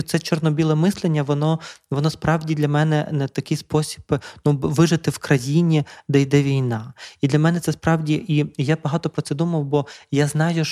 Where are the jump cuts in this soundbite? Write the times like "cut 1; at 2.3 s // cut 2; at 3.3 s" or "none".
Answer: none